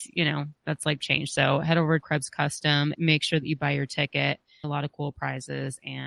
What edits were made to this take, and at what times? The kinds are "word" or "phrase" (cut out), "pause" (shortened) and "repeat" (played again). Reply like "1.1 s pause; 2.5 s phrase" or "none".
1.0 s word; 2.0 s word; 2.9 s word; 4.6 s word

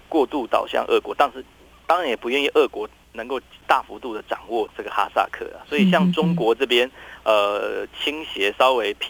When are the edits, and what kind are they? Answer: none

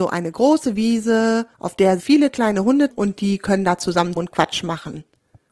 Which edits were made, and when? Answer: 1.5 s pause; 2.0 s word; 2.9 s word; 4.2 s word

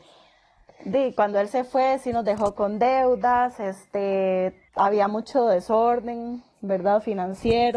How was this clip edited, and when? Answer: 4.7 s pause

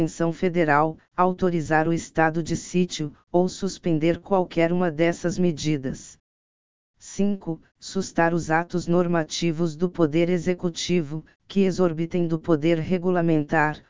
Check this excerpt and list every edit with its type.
none

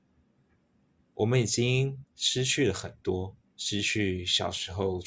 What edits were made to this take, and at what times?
3.4 s pause

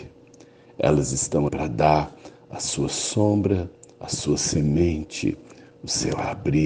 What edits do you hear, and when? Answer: 1.5 s word; 4.0 s phrase

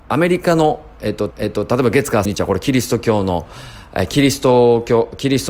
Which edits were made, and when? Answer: 1.3 s repeat; 2.2 s phrase

